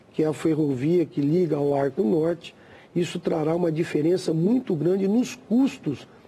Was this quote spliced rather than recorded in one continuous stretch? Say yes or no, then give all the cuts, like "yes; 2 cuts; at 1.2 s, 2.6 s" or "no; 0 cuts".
no; 0 cuts